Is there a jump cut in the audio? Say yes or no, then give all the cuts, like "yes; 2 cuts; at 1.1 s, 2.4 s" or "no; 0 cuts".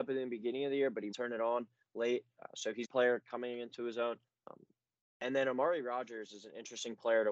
yes; 3 cuts; at 1.1 s, 2.8 s, 4.3 s